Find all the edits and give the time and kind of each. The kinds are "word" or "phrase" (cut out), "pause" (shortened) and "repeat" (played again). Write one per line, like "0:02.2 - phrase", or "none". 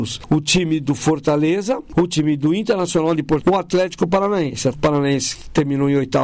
0:03.4 - word
0:04.7 - word